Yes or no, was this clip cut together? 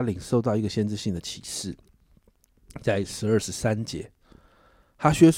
no